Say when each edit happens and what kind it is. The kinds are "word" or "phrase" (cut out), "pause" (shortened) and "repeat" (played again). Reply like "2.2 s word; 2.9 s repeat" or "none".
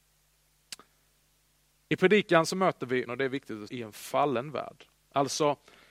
3.1 s word; 3.7 s word